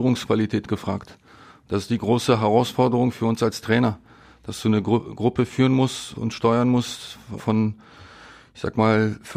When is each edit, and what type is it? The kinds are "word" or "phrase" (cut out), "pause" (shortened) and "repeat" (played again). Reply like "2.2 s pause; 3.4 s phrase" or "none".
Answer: 6.2 s word; 7.4 s word